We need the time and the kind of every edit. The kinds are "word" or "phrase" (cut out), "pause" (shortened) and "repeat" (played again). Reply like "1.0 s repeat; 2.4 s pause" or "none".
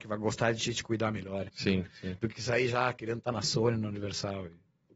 none